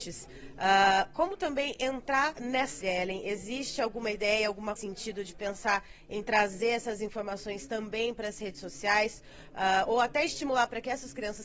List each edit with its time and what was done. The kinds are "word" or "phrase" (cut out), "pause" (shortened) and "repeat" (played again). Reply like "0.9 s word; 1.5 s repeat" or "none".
2.4 s word; 2.8 s word; 4.8 s phrase